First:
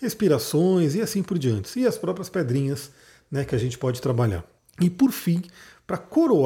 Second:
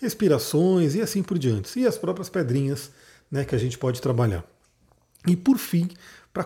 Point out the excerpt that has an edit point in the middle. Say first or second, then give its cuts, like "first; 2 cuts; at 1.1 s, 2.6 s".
first; 1 cut; at 4.6 s